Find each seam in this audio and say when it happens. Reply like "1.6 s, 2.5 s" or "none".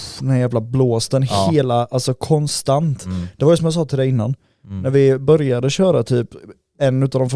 none